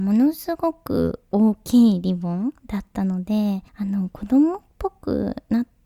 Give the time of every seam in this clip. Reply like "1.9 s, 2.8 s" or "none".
3.7 s